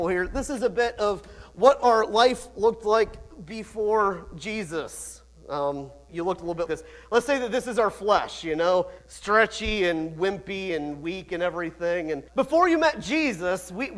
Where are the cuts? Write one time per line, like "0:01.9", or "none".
0:06.1
0:06.7
0:09.0
0:12.3